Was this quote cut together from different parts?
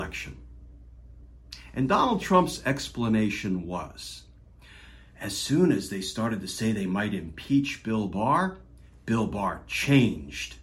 no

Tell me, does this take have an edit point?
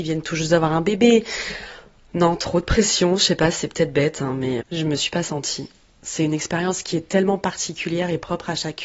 yes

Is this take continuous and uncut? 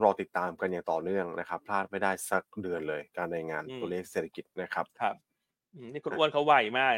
no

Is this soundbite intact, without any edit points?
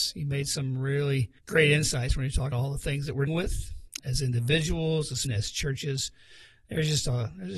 no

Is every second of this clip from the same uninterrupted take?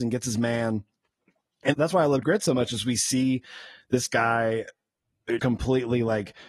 no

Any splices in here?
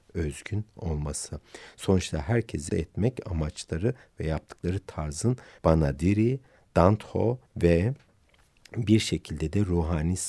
yes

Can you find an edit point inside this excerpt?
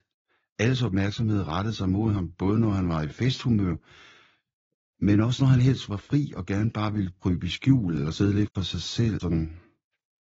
no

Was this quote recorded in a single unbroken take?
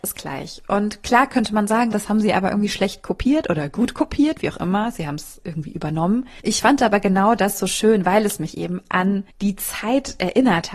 no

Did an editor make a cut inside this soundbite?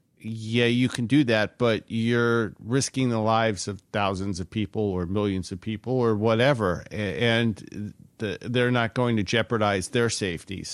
no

